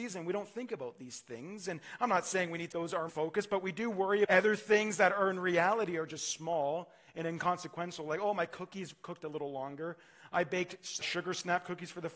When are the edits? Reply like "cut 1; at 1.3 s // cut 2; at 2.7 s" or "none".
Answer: cut 1; at 2.7 s // cut 2; at 3.1 s // cut 3; at 4.2 s // cut 4; at 11.0 s